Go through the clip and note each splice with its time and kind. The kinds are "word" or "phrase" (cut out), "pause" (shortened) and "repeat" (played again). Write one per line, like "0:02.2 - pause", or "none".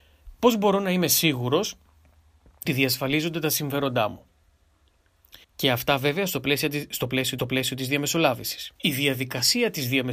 0:02.7 - word
0:05.4 - pause
0:07.4 - repeat
0:08.8 - pause